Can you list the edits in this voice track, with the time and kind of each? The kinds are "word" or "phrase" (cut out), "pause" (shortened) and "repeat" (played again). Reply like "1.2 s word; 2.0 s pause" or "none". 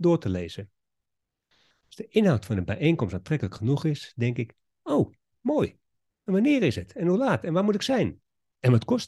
none

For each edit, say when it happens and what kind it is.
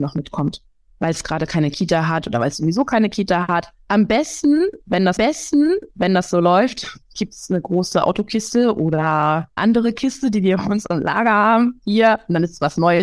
5.2 s repeat; 9.6 s word

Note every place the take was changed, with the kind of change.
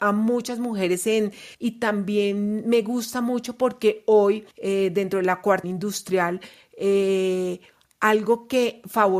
1.5 s phrase; 4.5 s pause; 5.6 s word

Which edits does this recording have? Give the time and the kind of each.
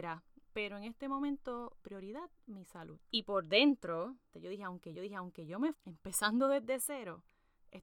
1.8 s word; 3.0 s pause; 4.3 s phrase; 4.9 s repeat; 5.7 s word

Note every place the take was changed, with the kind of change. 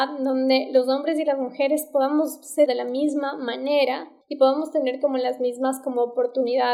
2.7 s word; 4.2 s pause

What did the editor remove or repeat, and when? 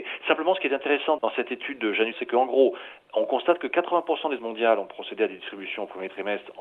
1.2 s word; 2.1 s word; 4.4 s word

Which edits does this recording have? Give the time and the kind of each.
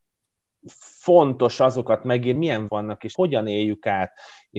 2.4 s word; 2.7 s word; 3.1 s word

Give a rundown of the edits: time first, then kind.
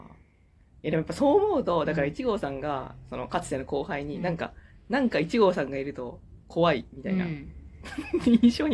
none

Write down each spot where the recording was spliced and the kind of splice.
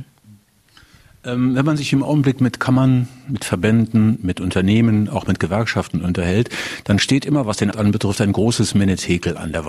7.7 s word

